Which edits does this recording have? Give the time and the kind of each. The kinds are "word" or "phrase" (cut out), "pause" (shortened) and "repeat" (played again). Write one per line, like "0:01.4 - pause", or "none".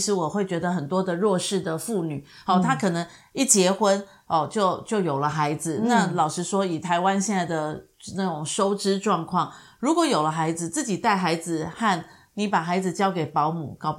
none